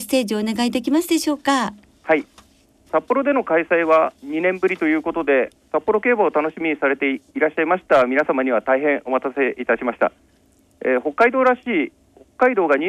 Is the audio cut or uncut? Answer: cut